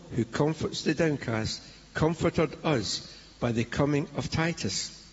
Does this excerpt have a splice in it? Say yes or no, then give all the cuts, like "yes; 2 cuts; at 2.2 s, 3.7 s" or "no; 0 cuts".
no; 0 cuts